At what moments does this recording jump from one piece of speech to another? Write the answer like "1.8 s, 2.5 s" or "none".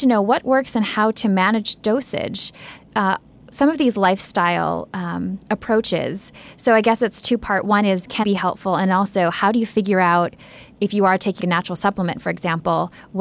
8.2 s, 11.4 s